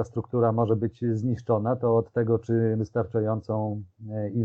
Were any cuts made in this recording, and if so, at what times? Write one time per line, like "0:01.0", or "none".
0:02.8